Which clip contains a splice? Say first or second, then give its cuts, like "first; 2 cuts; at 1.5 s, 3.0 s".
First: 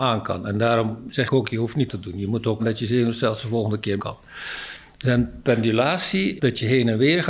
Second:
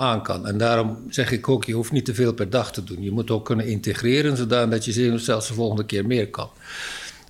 first; 5 cuts; at 1.3 s, 1.9 s, 2.6 s, 4.0 s, 6.4 s